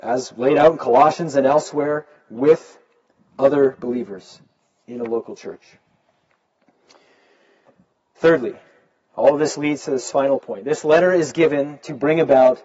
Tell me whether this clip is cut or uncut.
uncut